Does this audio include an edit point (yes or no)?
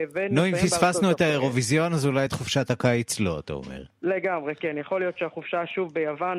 no